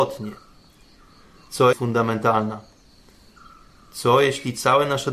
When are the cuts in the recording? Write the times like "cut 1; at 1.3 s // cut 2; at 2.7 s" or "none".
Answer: cut 1; at 1.7 s

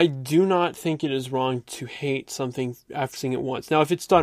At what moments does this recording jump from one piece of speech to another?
cut 1; at 3.1 s

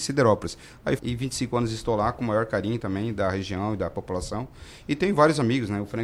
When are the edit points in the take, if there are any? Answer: cut 1; at 1.0 s

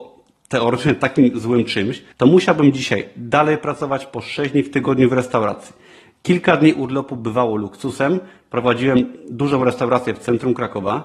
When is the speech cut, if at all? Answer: cut 1; at 2.1 s

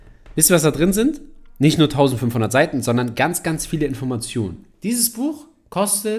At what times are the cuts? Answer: cut 1; at 4.7 s

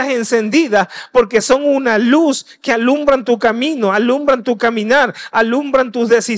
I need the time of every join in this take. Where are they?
none

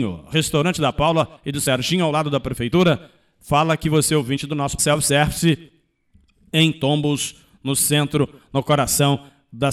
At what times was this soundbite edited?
cut 1; at 4.8 s

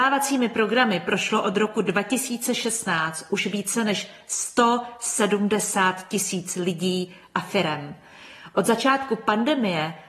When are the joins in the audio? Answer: none

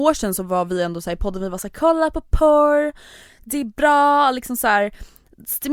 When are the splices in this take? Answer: none

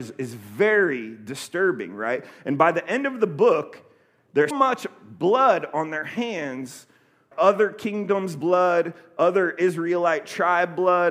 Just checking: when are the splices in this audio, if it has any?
cut 1; at 4.5 s // cut 2; at 7.3 s

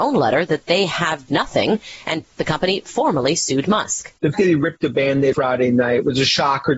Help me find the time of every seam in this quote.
cut 1; at 1.3 s // cut 2; at 2.2 s // cut 3; at 4.3 s // cut 4; at 5.3 s

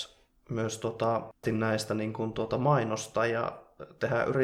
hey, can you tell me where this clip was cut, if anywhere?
cut 1; at 1.4 s

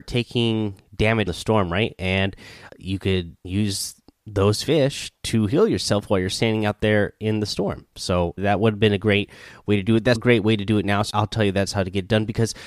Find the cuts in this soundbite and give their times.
cut 1; at 1.3 s // cut 2; at 2.7 s // cut 3; at 3.4 s // cut 4; at 8.4 s // cut 5; at 10.2 s // cut 6; at 11.1 s

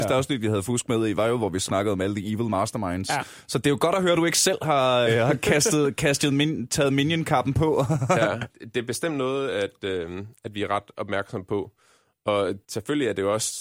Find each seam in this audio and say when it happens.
cut 1; at 1.7 s // cut 2; at 5.1 s // cut 3; at 8.5 s // cut 4; at 12.6 s

